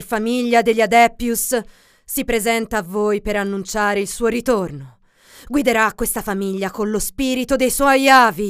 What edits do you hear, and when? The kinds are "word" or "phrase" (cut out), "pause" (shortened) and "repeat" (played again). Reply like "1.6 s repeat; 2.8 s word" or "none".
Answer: none